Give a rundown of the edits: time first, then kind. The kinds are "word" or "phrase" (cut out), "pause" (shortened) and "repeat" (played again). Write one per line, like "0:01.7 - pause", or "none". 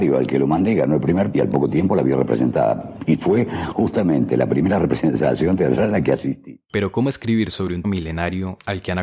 0:01.3 - word
0:07.8 - word